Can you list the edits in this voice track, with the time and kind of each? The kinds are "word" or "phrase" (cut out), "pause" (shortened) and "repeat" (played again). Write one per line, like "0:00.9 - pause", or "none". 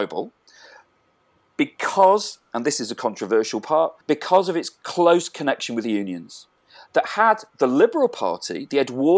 0:04.0 - pause